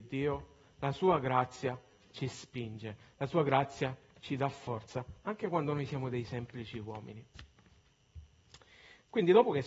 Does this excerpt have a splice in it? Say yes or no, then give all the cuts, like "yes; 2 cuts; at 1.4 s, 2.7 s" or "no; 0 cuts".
no; 0 cuts